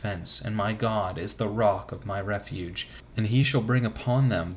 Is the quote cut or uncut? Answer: uncut